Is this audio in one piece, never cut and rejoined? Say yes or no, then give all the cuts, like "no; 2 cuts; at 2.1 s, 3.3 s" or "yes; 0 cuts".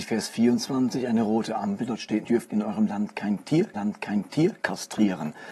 no; 2 cuts; at 2.2 s, 3.7 s